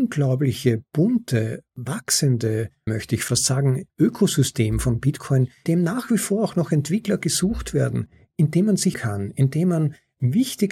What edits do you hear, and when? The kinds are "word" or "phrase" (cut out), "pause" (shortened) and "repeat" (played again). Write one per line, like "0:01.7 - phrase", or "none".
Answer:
0:02.9 - word
0:03.9 - pause
0:05.7 - word
0:08.9 - word